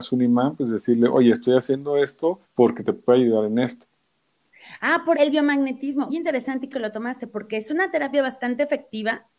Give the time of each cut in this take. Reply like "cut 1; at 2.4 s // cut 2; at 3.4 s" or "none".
cut 1; at 2.4 s // cut 2; at 5.1 s // cut 3; at 6.1 s // cut 4; at 6.7 s